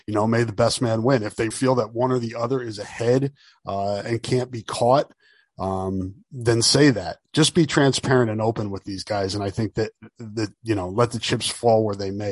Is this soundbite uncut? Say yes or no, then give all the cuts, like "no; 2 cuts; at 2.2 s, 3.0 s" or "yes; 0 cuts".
no; 1 cut; at 1.5 s